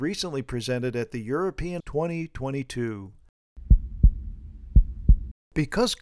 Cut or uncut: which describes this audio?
cut